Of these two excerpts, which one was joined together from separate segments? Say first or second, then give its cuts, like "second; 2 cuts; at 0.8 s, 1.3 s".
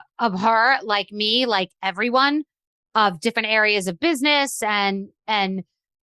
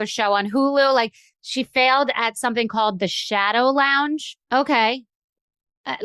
second; 1 cut; at 4.4 s